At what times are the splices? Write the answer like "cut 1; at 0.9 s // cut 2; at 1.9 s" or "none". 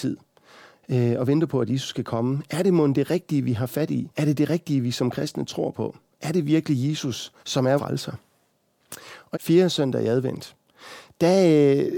cut 1; at 4.1 s // cut 2; at 7.4 s // cut 3; at 7.8 s // cut 4; at 9.3 s